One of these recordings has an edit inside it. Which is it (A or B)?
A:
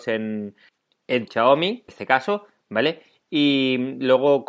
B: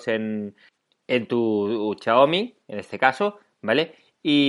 A